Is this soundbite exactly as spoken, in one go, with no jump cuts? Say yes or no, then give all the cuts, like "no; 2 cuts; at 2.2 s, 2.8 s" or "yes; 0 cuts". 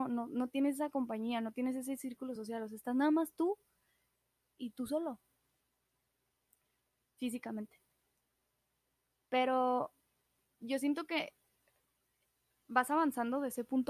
yes; 0 cuts